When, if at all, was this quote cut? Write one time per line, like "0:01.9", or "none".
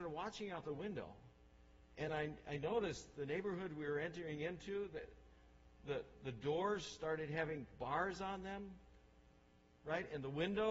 none